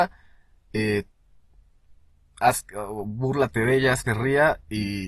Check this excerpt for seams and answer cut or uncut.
cut